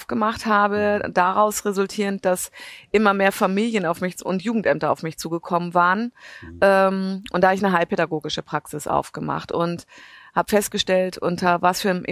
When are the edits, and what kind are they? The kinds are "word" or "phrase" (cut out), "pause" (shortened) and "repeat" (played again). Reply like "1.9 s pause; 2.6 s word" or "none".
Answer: none